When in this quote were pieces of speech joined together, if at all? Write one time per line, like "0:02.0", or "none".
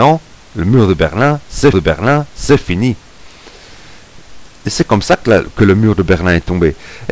0:01.7